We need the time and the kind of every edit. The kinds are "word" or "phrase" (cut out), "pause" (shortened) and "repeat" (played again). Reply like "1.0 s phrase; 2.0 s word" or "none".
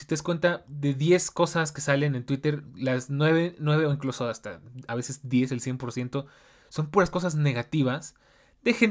none